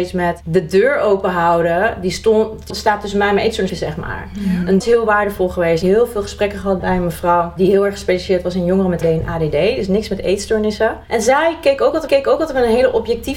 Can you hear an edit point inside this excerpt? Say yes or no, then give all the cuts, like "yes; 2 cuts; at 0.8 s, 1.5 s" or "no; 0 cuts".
yes; 6 cuts; at 2.7 s, 3.7 s, 4.8 s, 5.8 s, 9.0 s, 12.1 s